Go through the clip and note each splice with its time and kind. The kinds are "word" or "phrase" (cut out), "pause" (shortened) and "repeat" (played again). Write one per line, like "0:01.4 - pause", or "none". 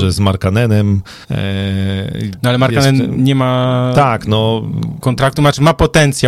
0:01.2 - pause